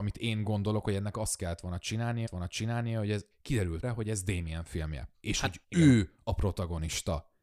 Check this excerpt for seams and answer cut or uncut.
cut